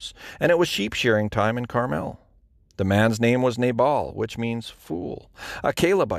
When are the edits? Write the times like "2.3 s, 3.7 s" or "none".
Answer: none